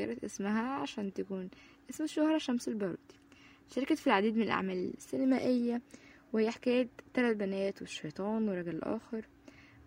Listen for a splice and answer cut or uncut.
uncut